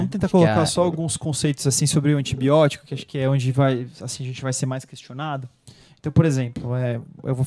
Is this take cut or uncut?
uncut